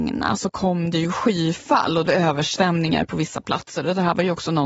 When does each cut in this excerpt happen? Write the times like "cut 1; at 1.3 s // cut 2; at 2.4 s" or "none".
cut 1; at 2.0 s

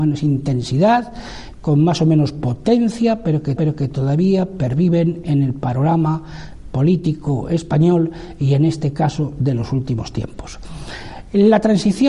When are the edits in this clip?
cut 1; at 3.6 s

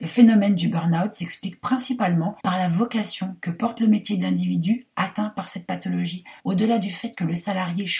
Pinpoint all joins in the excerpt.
cut 1; at 2.4 s // cut 2; at 6.4 s

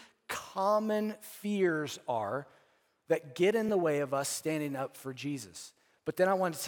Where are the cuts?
none

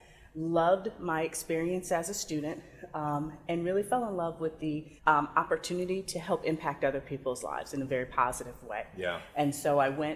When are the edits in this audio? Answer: cut 1; at 5.0 s

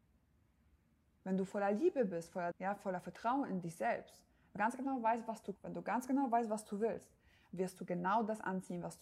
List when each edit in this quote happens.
cut 1; at 2.5 s // cut 2; at 4.6 s // cut 3; at 5.6 s

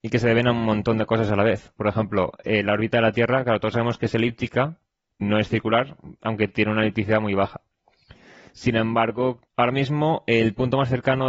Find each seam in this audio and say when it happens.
cut 1; at 5.2 s // cut 2; at 9.5 s

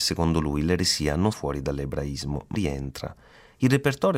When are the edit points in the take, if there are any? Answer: cut 1; at 1.3 s // cut 2; at 2.5 s

